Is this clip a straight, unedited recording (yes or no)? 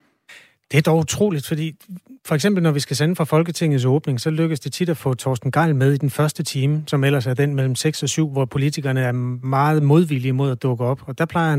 yes